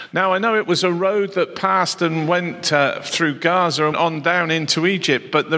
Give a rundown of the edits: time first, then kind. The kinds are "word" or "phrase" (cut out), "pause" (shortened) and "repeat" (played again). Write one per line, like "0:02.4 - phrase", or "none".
0:03.9 - word